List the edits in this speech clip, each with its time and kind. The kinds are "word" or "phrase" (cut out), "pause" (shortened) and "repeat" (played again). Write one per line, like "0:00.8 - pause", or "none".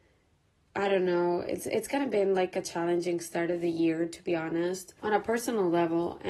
0:05.0 - pause